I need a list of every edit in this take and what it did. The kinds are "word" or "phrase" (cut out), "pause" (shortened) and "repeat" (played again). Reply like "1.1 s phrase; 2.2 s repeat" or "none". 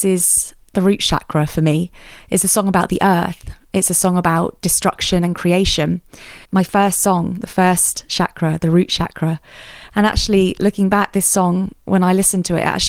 6.4 s pause